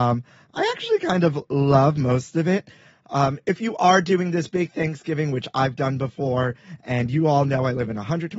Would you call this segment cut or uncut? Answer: uncut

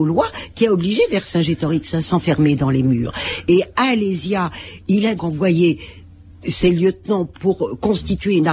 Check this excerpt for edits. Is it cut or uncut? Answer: cut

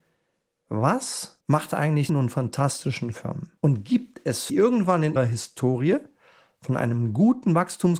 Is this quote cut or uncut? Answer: cut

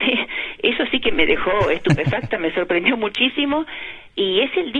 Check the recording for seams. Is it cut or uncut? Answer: uncut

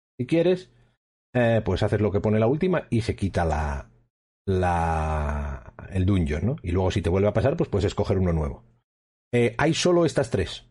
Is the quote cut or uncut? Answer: uncut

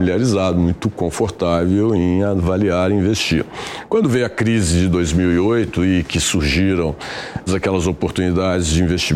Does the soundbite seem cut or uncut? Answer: cut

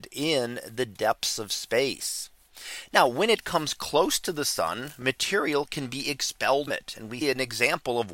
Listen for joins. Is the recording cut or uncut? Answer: cut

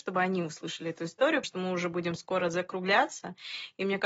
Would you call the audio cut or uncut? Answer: cut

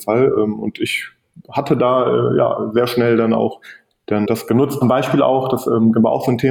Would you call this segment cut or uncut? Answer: cut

